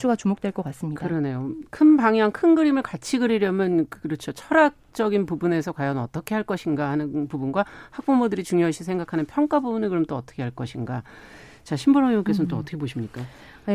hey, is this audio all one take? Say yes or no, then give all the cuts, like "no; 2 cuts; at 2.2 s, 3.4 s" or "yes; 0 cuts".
yes; 0 cuts